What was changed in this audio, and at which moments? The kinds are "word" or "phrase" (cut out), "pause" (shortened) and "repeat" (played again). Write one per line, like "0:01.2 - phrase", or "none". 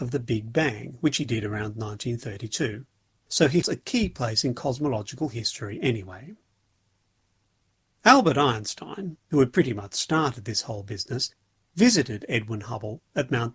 0:03.6 - word